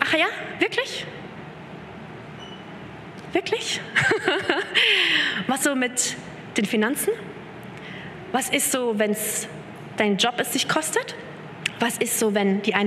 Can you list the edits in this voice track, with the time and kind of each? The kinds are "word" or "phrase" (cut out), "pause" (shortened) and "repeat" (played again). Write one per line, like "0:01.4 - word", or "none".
0:05.6 - word